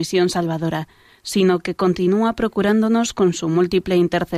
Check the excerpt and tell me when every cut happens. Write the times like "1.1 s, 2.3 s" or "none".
none